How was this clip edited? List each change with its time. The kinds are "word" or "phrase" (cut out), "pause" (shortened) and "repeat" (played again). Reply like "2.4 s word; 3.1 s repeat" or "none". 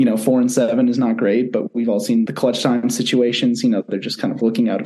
2.3 s phrase